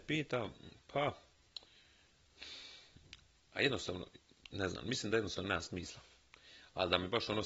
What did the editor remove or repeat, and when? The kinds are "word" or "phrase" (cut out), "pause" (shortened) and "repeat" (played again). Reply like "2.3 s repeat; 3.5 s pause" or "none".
none